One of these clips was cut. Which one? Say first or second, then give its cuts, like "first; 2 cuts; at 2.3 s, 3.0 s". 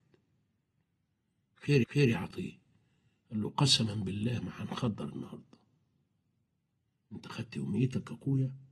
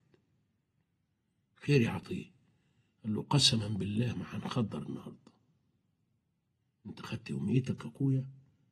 first; 1 cut; at 1.8 s